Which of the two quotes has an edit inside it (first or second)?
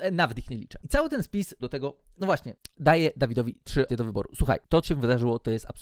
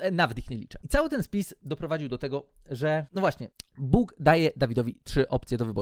first